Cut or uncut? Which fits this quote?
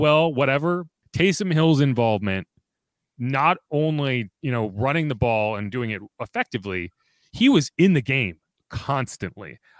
uncut